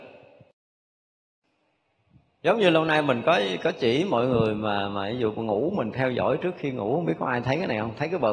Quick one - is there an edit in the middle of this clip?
no; 0 cuts

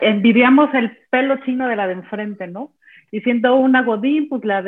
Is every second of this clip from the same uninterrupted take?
yes; 0 cuts

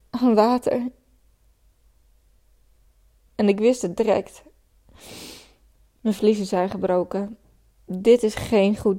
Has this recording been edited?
no; 0 cuts

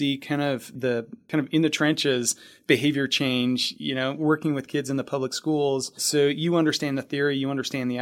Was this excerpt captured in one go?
yes; 0 cuts

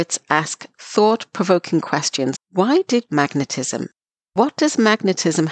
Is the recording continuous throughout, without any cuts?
no; 2 cuts; at 2.3 s, 3.1 s

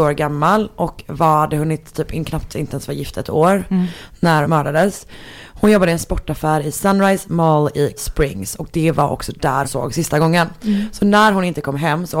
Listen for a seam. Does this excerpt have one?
yes; 3 cuts; at 4.4 s, 8.0 s, 9.6 s

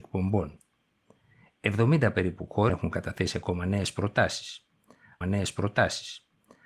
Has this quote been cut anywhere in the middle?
yes; 2 cuts; at 2.7 s, 5.2 s

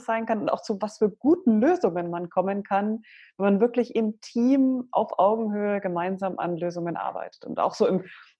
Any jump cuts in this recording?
no; 0 cuts

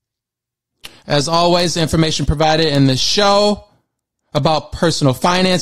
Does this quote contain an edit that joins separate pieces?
no; 0 cuts

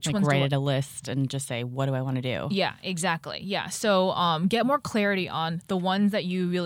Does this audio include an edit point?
no; 0 cuts

